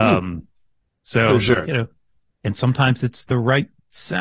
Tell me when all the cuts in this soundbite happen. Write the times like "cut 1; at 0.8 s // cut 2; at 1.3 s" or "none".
none